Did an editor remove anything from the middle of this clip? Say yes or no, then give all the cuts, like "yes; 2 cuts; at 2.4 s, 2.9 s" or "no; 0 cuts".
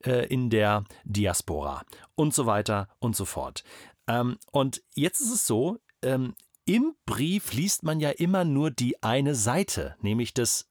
no; 0 cuts